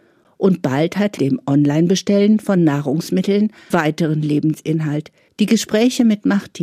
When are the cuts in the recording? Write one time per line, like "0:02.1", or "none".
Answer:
0:01.2
0:03.7
0:05.3